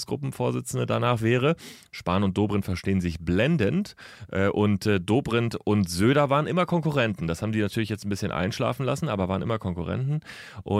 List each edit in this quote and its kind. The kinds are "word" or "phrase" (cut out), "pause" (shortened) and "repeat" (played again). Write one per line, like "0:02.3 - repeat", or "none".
none